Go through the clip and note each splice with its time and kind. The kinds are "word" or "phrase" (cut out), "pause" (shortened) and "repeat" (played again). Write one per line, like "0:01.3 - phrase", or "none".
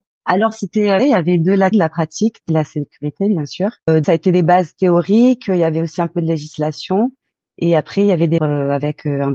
0:01.0 - word
0:01.7 - word
0:02.5 - phrase
0:04.0 - word
0:08.4 - word